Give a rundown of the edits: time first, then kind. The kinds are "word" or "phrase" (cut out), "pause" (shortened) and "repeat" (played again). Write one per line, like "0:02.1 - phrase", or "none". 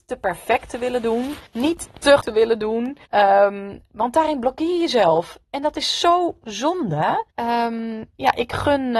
0:01.5 - pause
0:02.2 - word
0:03.0 - pause
0:07.3 - pause